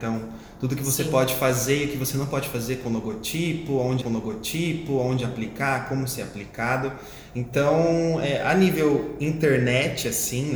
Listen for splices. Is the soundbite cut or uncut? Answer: cut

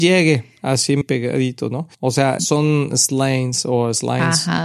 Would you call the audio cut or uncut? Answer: cut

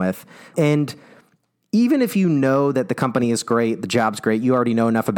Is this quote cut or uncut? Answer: uncut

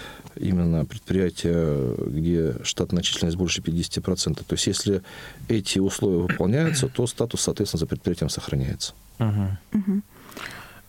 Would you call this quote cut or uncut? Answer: uncut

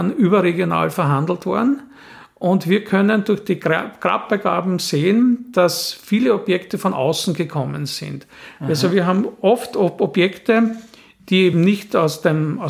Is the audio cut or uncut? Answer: uncut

